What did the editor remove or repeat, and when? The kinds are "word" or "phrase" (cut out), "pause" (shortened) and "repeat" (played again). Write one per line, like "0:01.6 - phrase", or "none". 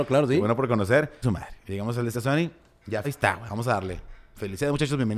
0:01.2 - word
0:02.1 - word
0:03.0 - word